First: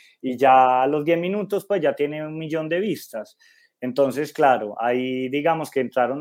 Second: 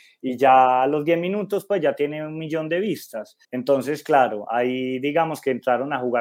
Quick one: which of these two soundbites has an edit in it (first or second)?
second